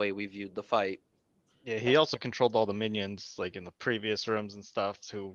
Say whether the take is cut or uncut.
uncut